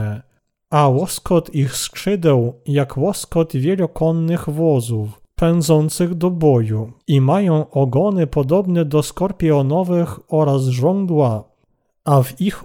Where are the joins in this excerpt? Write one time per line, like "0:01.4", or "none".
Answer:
0:05.3
0:07.0

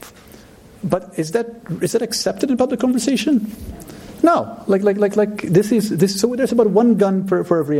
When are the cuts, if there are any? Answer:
none

